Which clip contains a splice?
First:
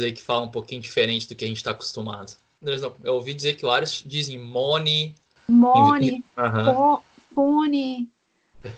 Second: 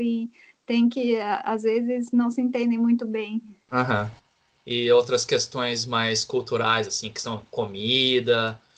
first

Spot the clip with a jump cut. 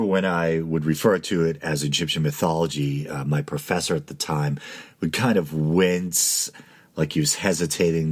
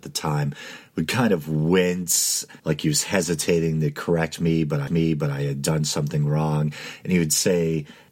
second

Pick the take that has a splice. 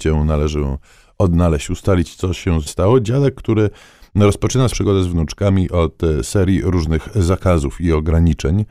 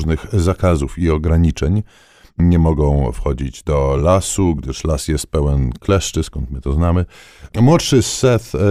first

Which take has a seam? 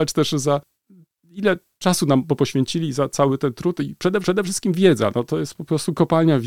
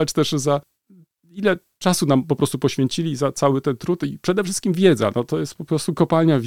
first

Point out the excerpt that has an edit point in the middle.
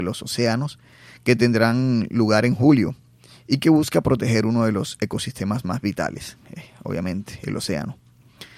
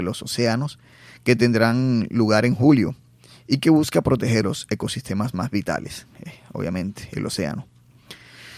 second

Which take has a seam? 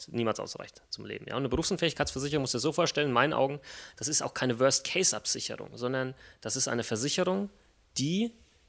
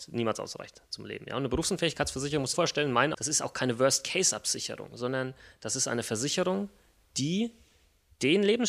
second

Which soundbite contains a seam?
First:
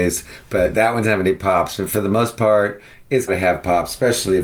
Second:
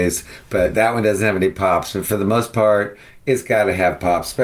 first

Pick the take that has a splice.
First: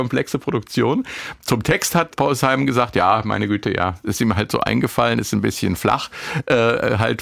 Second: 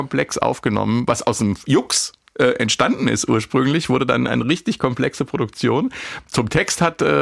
first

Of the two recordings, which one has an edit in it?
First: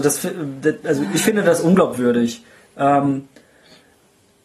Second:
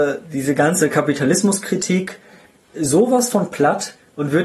second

